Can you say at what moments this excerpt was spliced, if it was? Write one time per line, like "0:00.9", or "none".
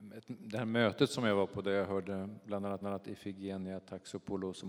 0:02.8